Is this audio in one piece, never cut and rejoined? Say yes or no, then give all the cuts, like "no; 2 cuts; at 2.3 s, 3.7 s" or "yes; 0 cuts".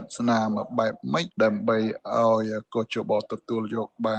no; 1 cut; at 1.3 s